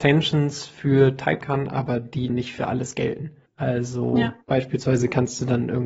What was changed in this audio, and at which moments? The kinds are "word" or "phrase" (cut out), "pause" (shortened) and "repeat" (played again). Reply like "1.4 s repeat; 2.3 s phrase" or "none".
1.4 s word; 2.3 s word; 3.5 s pause; 4.4 s pause